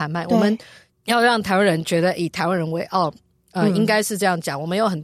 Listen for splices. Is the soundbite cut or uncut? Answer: uncut